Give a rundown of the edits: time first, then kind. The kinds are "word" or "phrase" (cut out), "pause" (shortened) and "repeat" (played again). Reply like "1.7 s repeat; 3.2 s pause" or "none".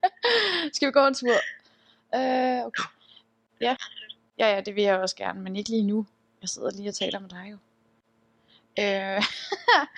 none